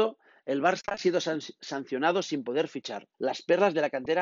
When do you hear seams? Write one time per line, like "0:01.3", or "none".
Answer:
0:03.1